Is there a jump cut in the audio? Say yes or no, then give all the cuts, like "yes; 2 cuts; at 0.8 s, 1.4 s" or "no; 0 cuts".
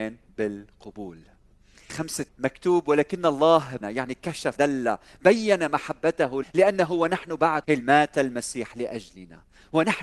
yes; 6 cuts; at 1.9 s, 2.3 s, 3.8 s, 4.6 s, 6.4 s, 7.6 s